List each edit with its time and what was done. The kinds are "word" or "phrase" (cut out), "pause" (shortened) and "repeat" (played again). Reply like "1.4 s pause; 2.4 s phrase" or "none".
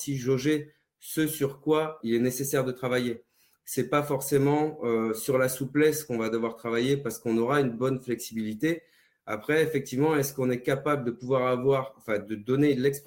2.0 s word